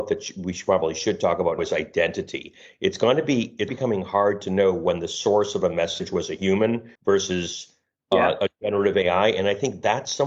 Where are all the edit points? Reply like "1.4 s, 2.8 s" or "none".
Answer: 1.6 s, 3.7 s, 7.0 s

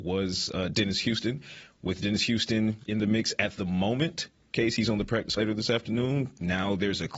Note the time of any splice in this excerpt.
2.9 s, 4.5 s, 5.4 s

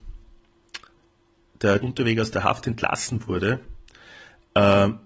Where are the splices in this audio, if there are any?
1.8 s

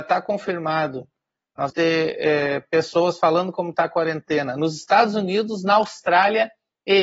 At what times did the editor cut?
1.7 s

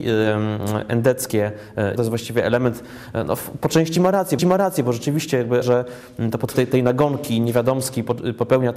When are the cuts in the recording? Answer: 2.0 s, 4.4 s, 5.6 s, 6.5 s

